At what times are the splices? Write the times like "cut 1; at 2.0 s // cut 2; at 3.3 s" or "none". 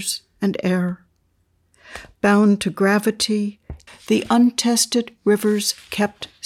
cut 1; at 3.9 s